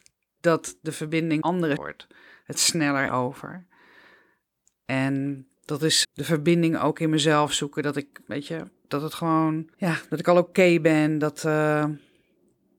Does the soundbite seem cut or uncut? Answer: cut